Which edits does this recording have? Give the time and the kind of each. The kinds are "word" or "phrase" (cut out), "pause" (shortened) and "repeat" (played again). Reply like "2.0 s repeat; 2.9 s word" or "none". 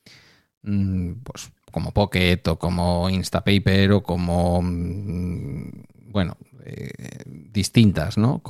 none